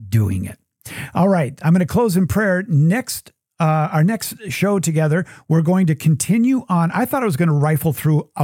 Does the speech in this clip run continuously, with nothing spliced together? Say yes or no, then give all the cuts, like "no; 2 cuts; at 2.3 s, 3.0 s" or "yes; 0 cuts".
yes; 0 cuts